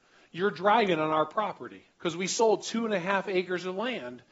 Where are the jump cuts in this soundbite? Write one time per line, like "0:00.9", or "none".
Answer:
0:01.9